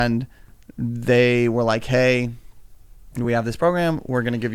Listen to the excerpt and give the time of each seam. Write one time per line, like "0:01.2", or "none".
none